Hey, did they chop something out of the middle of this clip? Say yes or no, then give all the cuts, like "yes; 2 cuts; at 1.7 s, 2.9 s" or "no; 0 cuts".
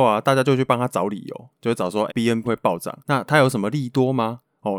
yes; 3 cuts; at 2.1 s, 2.4 s, 3.0 s